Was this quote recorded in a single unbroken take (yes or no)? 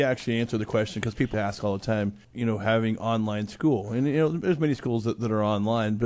no